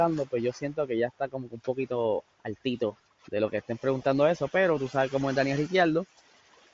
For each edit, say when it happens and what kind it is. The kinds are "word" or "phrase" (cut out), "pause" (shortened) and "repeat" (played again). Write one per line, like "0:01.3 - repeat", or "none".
none